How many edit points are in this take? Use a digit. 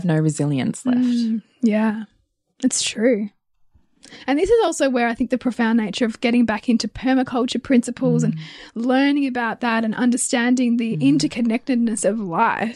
0